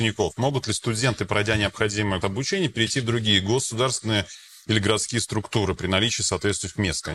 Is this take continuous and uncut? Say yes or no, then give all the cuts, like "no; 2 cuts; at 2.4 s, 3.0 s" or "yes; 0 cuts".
no; 1 cut; at 2.2 s